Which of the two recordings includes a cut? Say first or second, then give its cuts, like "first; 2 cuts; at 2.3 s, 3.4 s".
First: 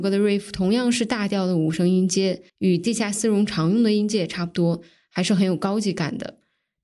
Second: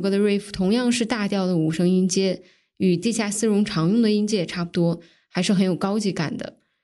first; 1 cut; at 2.5 s